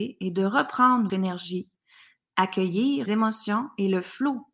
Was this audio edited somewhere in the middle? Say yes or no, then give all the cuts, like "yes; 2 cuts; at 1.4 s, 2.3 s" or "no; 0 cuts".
yes; 2 cuts; at 1.1 s, 3.1 s